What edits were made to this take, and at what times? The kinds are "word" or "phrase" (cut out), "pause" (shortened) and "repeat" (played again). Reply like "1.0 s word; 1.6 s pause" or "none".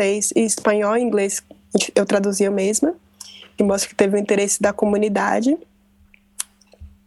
3.6 s word